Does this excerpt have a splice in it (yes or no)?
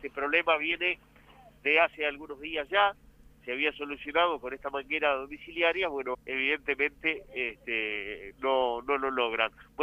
yes